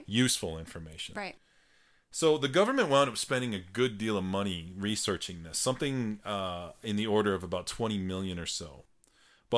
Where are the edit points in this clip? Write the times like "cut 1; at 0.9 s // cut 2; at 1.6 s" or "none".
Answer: none